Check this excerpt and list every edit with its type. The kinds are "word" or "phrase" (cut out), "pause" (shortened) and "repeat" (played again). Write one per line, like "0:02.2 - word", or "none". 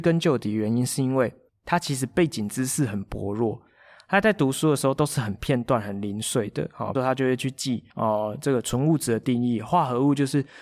0:01.5 - pause
0:06.9 - phrase
0:07.9 - pause